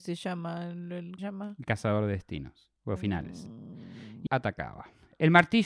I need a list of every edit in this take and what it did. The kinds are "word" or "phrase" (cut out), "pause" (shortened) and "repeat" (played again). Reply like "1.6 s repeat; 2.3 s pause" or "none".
1.2 s phrase; 2.8 s pause; 4.3 s word